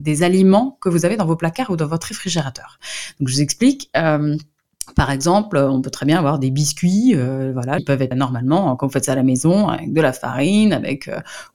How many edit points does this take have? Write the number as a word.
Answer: two